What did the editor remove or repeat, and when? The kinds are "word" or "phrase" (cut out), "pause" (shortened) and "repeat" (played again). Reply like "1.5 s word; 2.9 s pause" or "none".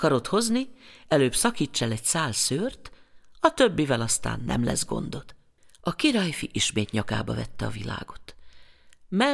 5.6 s pause